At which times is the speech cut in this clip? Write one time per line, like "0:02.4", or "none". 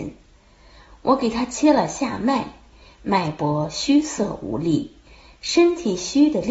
none